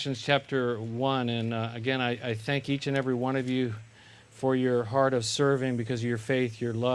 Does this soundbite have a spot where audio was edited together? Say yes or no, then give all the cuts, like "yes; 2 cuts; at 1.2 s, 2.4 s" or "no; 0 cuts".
no; 0 cuts